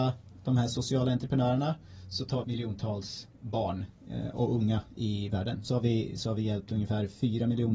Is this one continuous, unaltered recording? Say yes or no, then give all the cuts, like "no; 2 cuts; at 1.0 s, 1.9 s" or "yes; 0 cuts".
no; 3 cuts; at 2.4 s, 3.3 s, 5.7 s